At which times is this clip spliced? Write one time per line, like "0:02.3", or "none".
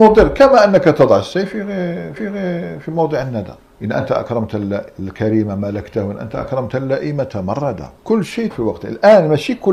0:02.2
0:03.6
0:08.0
0:08.5